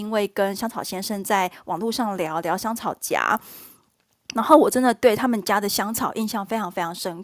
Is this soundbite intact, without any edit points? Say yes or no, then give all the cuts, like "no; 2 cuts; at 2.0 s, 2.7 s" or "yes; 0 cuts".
yes; 0 cuts